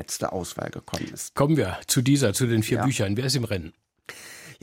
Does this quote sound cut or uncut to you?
uncut